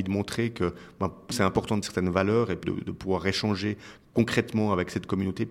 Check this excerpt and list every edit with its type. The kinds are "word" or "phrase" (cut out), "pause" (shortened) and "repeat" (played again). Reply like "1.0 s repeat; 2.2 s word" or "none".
1.3 s word; 1.8 s word; 2.6 s word